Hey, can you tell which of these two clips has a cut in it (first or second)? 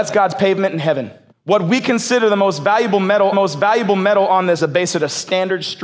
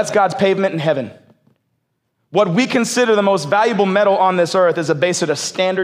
first